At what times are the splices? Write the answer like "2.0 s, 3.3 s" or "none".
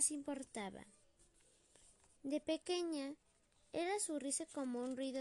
none